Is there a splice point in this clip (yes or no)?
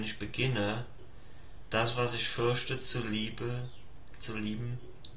no